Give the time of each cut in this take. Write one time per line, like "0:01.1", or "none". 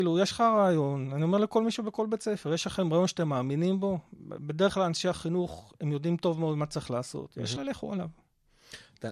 0:07.6